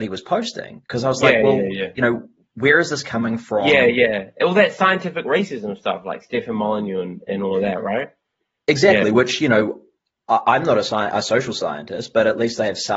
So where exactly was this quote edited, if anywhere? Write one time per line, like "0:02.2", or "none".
none